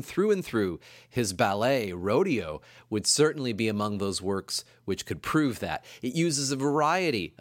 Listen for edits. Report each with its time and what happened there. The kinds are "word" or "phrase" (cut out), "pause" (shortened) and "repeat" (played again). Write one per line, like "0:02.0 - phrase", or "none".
none